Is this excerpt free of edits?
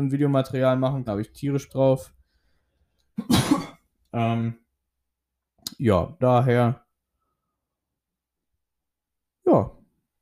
no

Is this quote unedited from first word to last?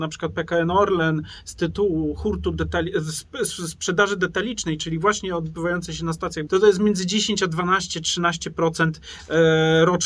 no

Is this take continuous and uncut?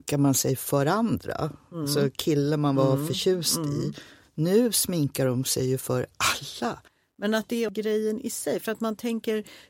yes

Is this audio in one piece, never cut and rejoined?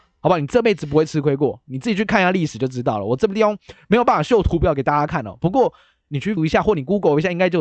no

